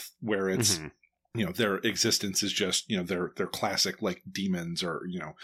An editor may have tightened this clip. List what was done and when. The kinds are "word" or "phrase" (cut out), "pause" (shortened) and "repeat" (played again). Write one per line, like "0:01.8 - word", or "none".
none